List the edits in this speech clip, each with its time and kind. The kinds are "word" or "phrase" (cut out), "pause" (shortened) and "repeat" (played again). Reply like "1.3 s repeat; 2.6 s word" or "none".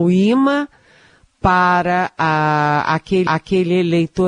3.3 s repeat